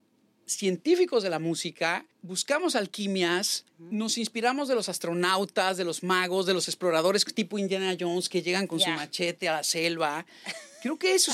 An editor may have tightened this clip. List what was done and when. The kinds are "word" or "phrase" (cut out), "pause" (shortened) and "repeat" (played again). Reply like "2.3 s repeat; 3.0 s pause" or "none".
2.1 s pause; 3.7 s pause